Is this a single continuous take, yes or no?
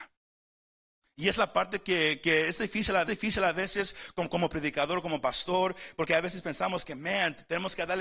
no